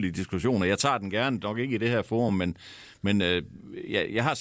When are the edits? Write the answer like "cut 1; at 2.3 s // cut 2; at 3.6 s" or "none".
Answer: none